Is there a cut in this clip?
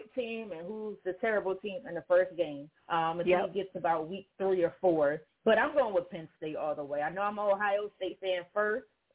yes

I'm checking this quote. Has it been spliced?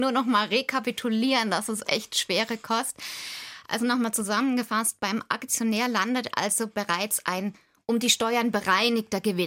no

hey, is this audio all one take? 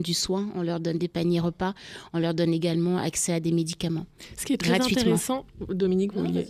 yes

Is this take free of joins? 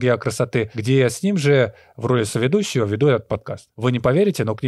yes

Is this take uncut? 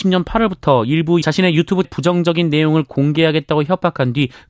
no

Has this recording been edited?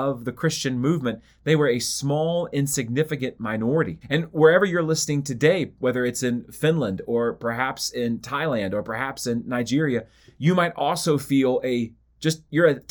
yes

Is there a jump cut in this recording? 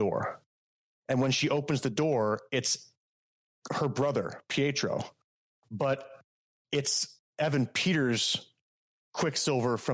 no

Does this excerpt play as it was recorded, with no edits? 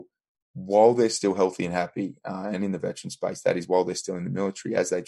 yes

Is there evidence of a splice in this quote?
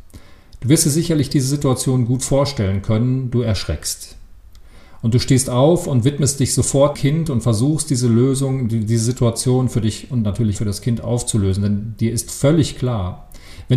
yes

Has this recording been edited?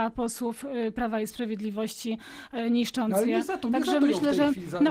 no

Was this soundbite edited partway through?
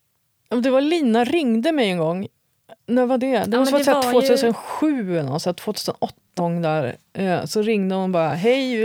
yes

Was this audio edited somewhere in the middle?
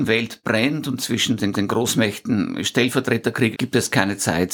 yes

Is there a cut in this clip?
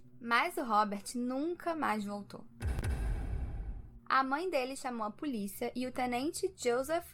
no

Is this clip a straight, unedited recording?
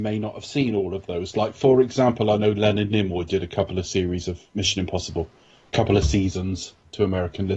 yes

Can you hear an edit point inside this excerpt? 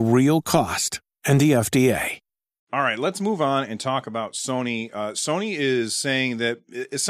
no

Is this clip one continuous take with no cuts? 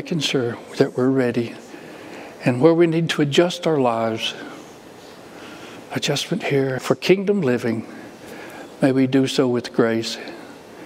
no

